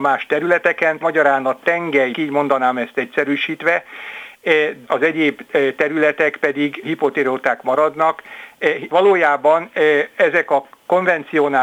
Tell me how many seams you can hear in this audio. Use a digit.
5